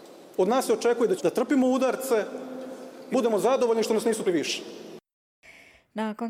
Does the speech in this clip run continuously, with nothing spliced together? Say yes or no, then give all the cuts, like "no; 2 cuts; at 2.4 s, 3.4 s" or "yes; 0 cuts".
no; 3 cuts; at 1.2 s, 3.1 s, 4.3 s